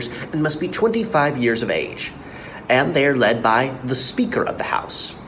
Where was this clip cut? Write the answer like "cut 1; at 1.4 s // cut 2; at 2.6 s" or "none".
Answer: none

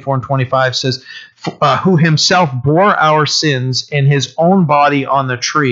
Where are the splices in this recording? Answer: none

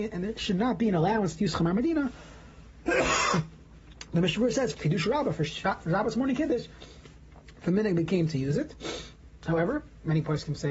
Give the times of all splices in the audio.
cut 1; at 4.7 s

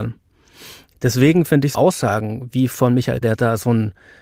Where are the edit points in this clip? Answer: cut 1; at 1.7 s // cut 2; at 3.2 s

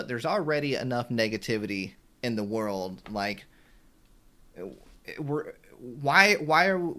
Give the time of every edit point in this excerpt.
none

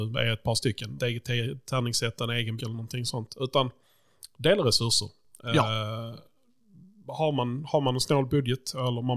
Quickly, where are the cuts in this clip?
cut 1; at 1.0 s // cut 2; at 2.6 s

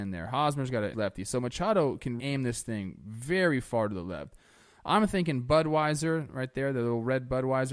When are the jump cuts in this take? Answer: cut 1; at 0.9 s // cut 2; at 2.2 s

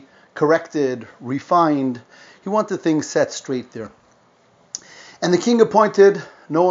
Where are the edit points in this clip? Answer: none

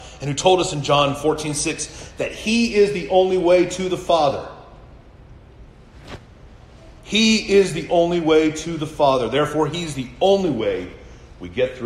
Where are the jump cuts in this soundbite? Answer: none

